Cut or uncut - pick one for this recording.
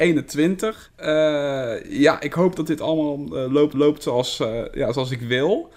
cut